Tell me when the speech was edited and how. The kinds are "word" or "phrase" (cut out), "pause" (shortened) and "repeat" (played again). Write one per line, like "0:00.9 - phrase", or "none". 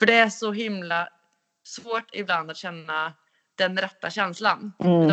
none